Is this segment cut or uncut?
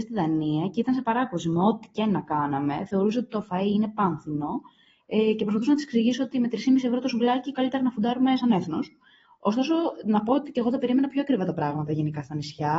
uncut